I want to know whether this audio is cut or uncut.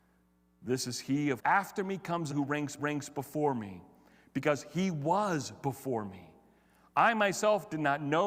cut